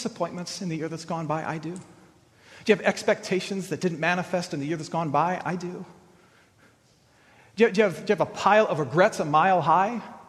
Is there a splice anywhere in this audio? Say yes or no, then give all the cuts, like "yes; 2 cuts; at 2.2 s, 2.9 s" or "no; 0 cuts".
no; 0 cuts